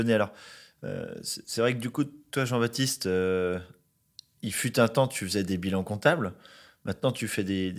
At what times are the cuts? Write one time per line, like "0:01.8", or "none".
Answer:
none

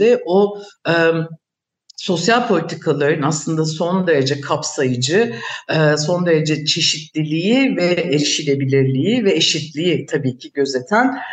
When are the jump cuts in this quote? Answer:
none

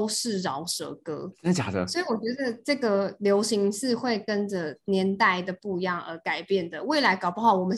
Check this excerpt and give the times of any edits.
none

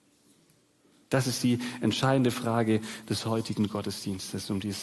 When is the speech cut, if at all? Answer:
none

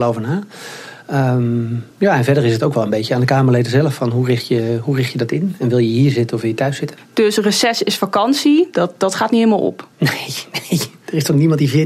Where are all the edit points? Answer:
0:01.9
0:09.9

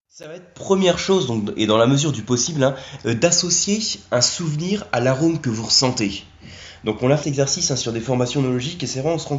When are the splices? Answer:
0:07.2

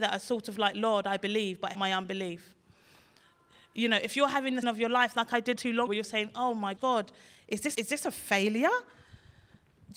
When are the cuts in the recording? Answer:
0:01.7
0:04.6
0:05.6
0:05.9
0:06.8
0:07.7

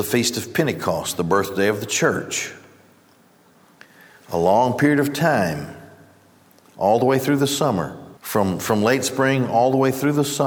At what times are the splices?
0:08.2

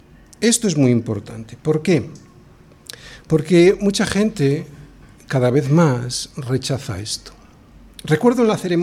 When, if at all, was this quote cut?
none

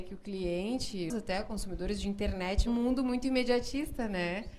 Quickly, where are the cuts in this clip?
0:01.1
0:02.7

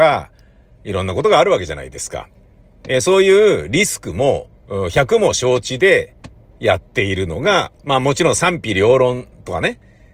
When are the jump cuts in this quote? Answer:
0:04.6
0:07.8

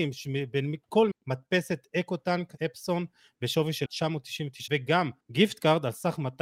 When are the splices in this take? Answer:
0:01.1
0:02.6
0:03.9
0:04.7
0:05.2

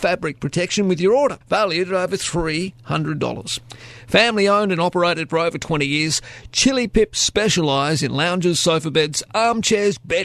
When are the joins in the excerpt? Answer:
0:01.4

